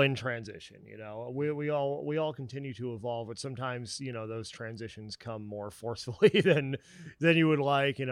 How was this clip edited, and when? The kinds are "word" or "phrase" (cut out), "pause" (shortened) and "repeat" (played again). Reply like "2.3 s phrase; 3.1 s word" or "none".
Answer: none